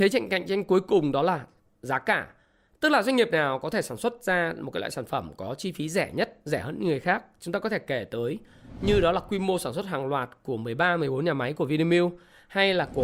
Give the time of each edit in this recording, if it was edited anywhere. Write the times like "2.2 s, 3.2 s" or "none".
none

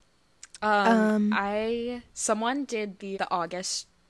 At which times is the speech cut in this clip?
2.1 s, 3.1 s

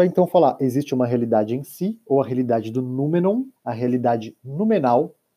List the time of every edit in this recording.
3.6 s

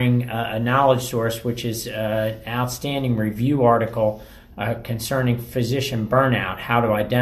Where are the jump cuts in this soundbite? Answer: none

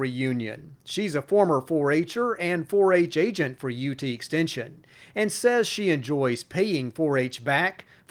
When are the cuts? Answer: none

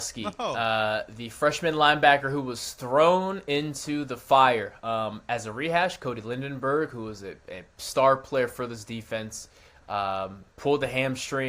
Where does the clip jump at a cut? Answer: 10.5 s

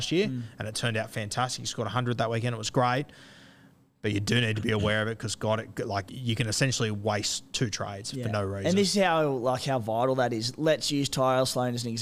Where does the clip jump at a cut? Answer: 6.1 s

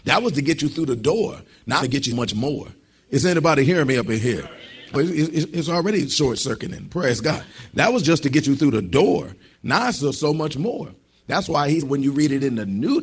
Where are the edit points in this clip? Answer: 1.8 s, 2.1 s, 4.9 s, 11.8 s

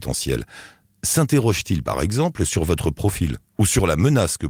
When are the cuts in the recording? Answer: 3.5 s

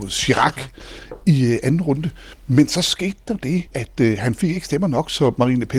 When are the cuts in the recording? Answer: 3.7 s

